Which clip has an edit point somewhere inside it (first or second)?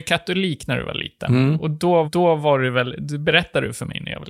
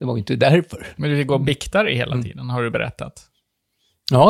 first